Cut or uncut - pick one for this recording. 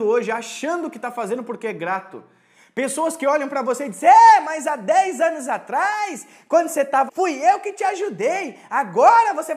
cut